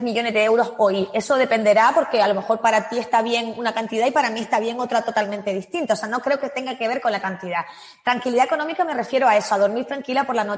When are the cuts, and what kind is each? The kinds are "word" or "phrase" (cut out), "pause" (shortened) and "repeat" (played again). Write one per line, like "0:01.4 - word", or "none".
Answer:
none